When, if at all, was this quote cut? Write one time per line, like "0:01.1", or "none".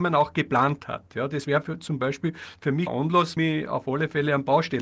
0:02.9
0:03.4